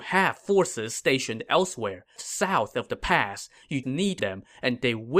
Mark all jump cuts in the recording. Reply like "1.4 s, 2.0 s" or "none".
2.2 s, 3.8 s, 4.2 s